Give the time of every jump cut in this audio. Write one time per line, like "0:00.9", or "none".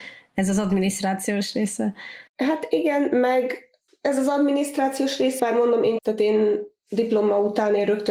0:02.3
0:03.9
0:05.4
0:06.0